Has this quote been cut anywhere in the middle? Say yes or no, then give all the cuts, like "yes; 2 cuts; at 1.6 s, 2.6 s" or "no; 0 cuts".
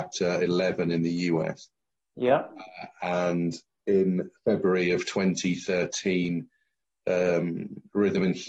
no; 0 cuts